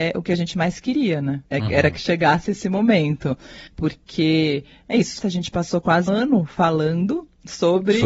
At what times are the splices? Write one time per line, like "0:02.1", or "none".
0:01.4
0:03.7
0:05.2
0:06.1